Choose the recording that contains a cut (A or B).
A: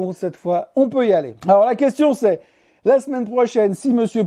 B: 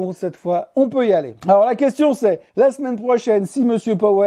B